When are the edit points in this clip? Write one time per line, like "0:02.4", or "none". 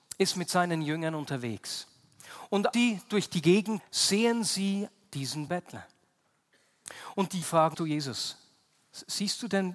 0:02.7
0:03.8
0:05.5
0:07.4
0:07.7